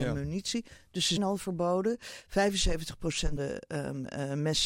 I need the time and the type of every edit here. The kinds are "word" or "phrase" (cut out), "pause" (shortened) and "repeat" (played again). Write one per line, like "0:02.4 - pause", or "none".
0:01.2 - word
0:03.4 - word